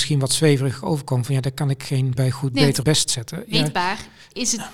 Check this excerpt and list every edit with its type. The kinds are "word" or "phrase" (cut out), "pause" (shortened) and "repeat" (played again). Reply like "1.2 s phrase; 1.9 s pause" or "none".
2.2 s word; 2.8 s word